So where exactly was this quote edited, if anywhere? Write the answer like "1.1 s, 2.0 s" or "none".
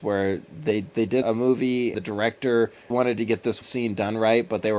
1.2 s, 1.9 s, 2.9 s, 3.6 s